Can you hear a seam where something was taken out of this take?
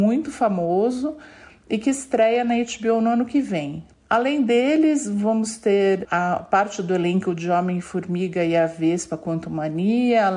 no; 0 cuts

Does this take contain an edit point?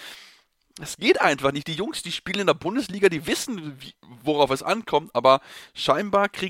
no; 0 cuts

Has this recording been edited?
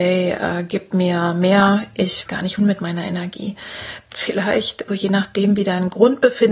yes; 4 cuts; at 2.3 s, 2.6 s, 4.1 s, 4.9 s

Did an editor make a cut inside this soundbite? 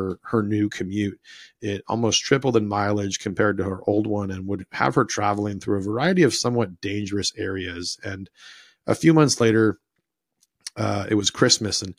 no; 0 cuts

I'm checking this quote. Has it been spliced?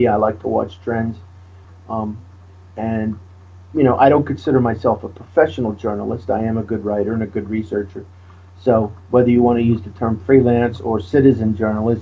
no; 0 cuts

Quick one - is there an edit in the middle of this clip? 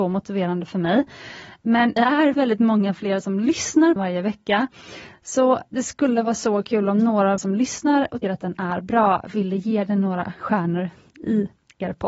yes; 5 cuts; at 2.0 s, 2.3 s, 4.0 s, 7.4 s, 8.2 s

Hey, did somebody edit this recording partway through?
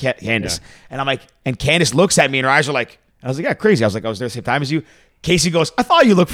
yes; 1 cut; at 3.1 s

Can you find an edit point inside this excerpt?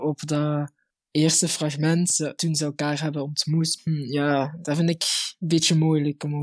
yes; 1 cut; at 3.8 s

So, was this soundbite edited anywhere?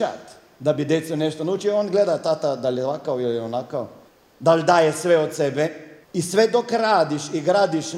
yes; 2 cuts; at 4.1 s, 6.0 s

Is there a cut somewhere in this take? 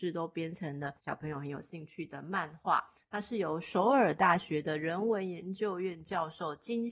yes; 1 cut; at 1.0 s

